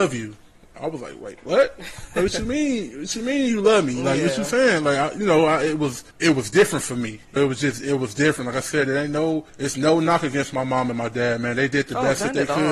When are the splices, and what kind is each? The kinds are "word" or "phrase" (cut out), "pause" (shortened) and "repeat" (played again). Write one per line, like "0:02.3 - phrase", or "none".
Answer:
0:06.1 - pause
0:07.4 - word
0:09.5 - pause